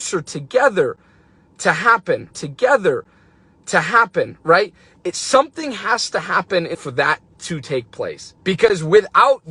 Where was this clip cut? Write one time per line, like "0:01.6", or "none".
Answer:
0:02.3
0:06.7
0:08.4